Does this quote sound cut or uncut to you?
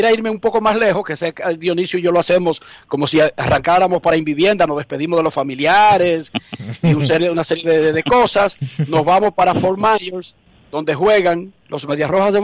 uncut